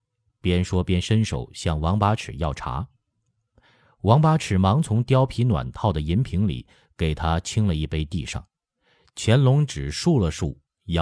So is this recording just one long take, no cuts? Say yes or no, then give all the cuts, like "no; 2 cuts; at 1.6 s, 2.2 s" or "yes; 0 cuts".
yes; 0 cuts